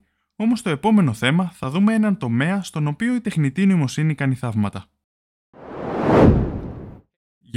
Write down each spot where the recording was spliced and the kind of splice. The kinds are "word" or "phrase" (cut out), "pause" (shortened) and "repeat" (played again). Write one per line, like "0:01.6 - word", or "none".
none